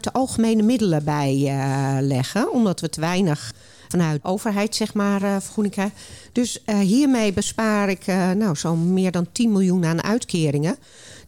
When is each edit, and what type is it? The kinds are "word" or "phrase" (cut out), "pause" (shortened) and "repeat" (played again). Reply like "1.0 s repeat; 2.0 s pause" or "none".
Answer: none